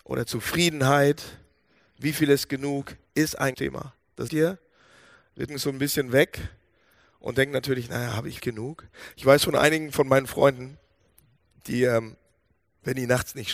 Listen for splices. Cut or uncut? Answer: cut